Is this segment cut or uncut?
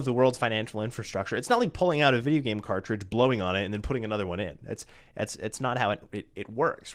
uncut